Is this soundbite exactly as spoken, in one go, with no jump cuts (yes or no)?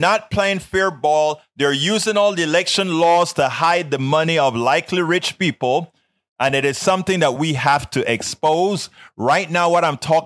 yes